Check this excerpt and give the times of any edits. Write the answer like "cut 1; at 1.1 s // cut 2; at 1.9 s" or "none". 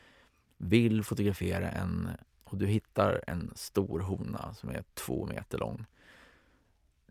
cut 1; at 2.3 s

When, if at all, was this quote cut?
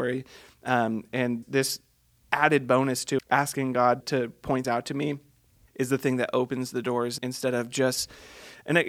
cut 1; at 1.4 s // cut 2; at 3.2 s // cut 3; at 4.0 s // cut 4; at 4.6 s // cut 5; at 5.7 s // cut 6; at 7.2 s

